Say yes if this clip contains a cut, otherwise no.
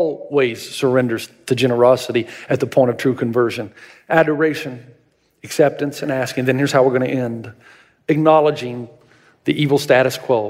no